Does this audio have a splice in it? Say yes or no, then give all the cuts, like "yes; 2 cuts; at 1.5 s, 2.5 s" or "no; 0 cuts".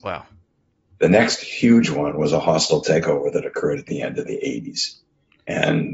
no; 0 cuts